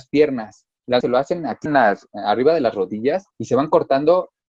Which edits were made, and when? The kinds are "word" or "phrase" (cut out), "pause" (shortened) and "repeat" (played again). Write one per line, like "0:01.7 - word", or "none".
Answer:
0:01.0 - word
0:01.7 - word
0:03.3 - pause